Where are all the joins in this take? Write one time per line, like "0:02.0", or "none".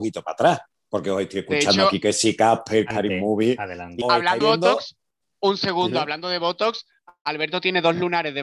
0:02.9
0:04.0
0:04.4